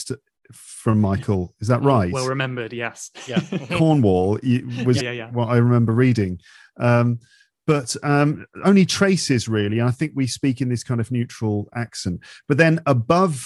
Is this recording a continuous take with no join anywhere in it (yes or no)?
no